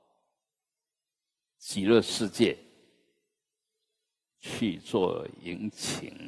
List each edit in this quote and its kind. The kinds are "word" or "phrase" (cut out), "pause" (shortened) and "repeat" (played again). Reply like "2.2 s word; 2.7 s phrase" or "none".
none